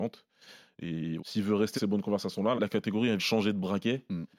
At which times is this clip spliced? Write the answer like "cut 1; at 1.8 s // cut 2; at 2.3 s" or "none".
cut 1; at 1.2 s // cut 2; at 1.8 s // cut 3; at 2.6 s // cut 4; at 3.2 s